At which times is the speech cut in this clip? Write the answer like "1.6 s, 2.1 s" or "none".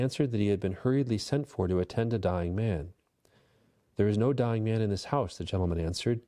none